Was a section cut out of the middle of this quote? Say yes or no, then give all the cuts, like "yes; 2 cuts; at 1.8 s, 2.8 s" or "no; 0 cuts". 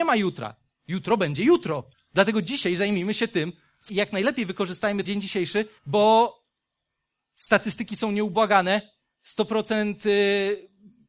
yes; 4 cuts; at 1.9 s, 3.9 s, 5.0 s, 5.8 s